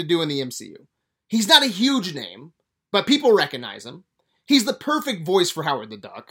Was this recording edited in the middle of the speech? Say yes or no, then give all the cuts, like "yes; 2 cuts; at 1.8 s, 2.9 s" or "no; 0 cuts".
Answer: no; 0 cuts